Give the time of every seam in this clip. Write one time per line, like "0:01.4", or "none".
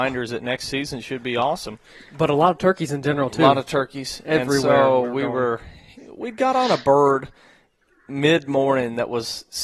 none